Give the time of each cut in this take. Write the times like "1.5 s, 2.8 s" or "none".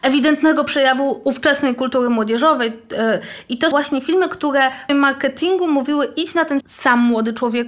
3.7 s, 4.9 s, 6.6 s